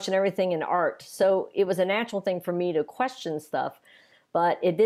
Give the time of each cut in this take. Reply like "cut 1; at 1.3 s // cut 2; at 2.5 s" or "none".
none